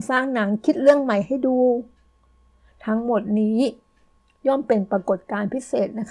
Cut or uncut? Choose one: uncut